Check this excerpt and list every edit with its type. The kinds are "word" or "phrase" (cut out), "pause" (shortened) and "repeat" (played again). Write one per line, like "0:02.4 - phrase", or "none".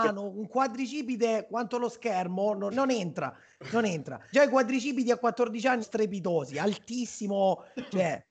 0:02.7 - word
0:04.3 - word
0:05.8 - word